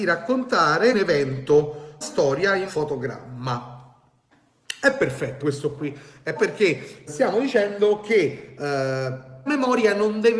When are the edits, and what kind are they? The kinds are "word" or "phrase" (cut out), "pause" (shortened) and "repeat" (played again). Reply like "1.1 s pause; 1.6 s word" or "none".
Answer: 0.9 s word; 2.0 s word; 2.7 s word; 5.4 s word; 6.4 s word; 7.1 s word; 9.5 s word